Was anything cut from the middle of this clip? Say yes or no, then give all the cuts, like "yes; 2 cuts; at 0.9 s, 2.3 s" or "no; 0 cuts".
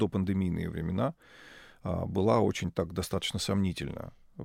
no; 0 cuts